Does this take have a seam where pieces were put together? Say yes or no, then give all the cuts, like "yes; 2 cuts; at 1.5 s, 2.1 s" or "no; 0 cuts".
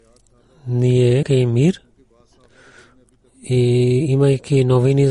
yes; 1 cut; at 1.2 s